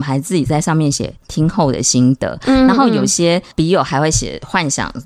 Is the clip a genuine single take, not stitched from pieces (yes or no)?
no